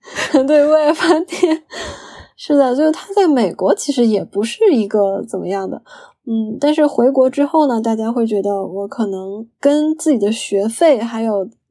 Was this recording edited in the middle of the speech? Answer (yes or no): no